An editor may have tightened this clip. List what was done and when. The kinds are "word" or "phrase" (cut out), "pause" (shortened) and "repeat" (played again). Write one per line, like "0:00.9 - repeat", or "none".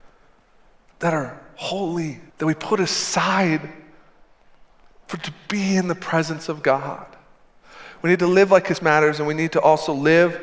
0:02.3 - pause
0:08.8 - word